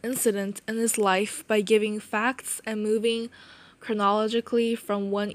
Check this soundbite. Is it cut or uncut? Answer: uncut